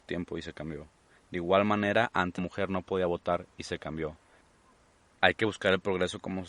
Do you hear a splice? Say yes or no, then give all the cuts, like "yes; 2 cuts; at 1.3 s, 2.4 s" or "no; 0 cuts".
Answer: yes; 1 cut; at 2.4 s